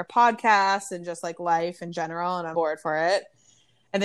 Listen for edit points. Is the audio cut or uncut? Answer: cut